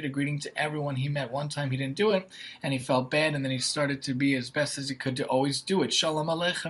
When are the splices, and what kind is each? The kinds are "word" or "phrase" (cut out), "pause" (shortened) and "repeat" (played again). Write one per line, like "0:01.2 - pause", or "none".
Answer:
none